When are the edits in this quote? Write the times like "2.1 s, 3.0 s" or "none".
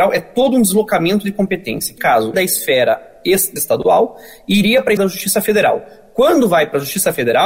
2.0 s, 2.3 s, 3.6 s, 5.0 s